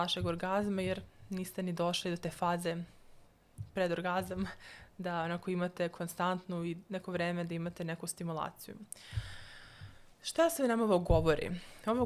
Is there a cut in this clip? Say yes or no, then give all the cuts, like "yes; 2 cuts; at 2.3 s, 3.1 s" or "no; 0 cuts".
yes; 1 cut; at 10.1 s